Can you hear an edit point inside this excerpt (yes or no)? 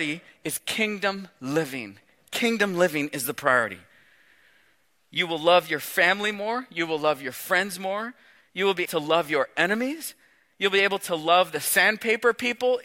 yes